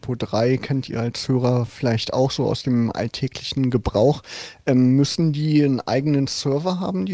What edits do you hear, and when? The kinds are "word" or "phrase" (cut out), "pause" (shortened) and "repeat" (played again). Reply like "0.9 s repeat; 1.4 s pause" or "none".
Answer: none